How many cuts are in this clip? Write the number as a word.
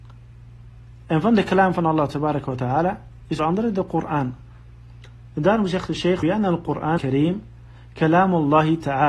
three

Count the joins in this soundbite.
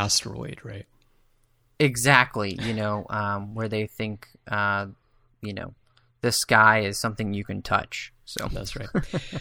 zero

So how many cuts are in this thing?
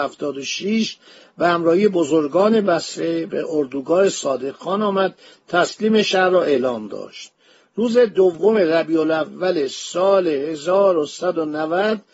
zero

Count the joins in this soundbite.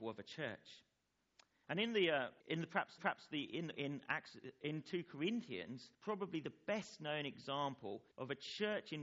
four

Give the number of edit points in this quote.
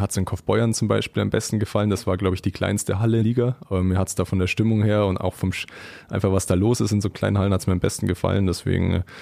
one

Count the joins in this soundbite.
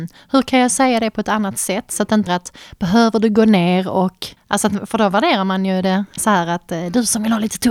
three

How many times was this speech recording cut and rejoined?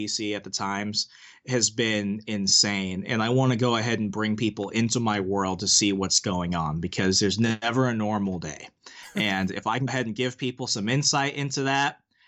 one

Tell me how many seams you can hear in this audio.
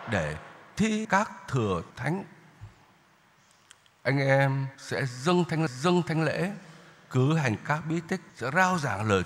five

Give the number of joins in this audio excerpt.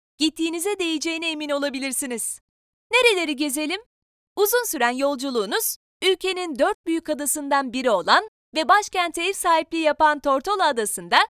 zero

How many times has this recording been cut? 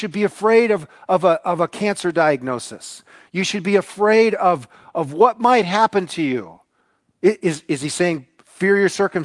zero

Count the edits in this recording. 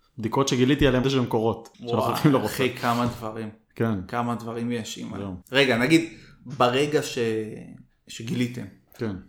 three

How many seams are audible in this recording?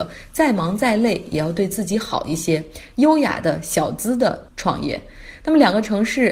one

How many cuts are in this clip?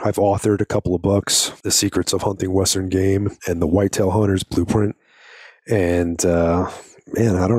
two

